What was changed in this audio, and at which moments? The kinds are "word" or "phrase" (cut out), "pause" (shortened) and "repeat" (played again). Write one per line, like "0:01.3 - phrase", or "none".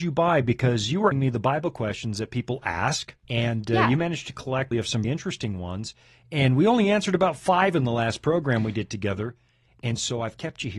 0:01.1 - word
0:03.2 - pause
0:04.7 - phrase
0:05.0 - word